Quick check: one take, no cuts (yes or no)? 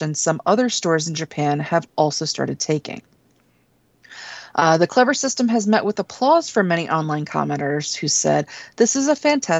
yes